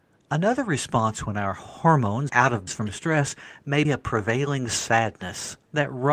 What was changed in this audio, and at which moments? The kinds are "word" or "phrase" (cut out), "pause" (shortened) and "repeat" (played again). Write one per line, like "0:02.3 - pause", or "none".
0:02.3 - word
0:02.7 - word
0:03.8 - word